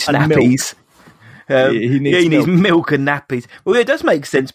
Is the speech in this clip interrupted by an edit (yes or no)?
no